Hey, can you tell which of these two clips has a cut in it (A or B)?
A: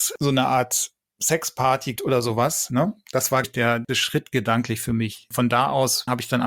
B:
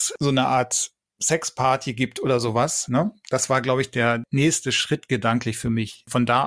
A